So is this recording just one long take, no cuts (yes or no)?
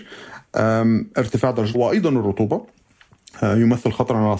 no